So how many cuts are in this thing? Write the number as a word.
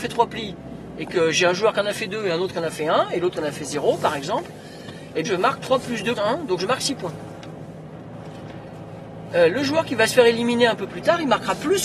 two